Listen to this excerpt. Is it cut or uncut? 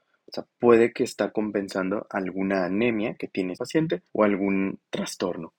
cut